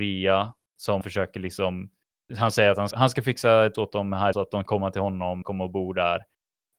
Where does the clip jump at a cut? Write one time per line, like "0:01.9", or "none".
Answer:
0:01.0
0:02.3
0:02.9
0:03.7
0:04.3
0:04.7
0:05.4